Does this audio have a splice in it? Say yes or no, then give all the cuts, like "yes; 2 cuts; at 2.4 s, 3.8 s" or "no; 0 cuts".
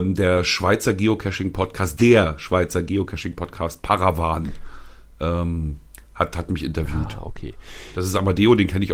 no; 0 cuts